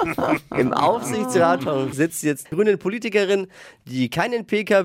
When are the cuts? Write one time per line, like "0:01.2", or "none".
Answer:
0:01.9
0:02.5